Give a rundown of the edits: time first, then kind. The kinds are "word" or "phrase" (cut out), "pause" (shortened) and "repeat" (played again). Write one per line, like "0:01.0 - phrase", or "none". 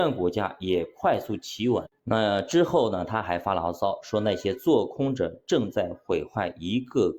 0:02.0 - pause